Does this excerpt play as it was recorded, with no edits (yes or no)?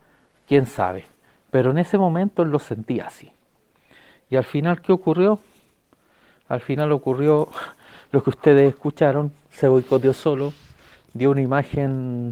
yes